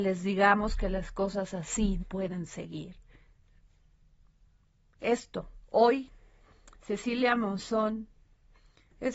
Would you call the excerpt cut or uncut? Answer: cut